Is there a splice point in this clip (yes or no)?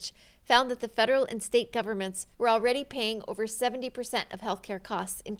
yes